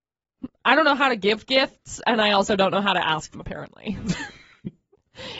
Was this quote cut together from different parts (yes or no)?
yes